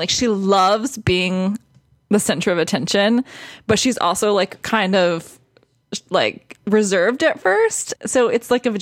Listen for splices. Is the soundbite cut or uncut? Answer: uncut